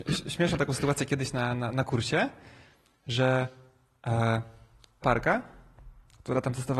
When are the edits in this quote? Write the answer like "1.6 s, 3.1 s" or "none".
5.0 s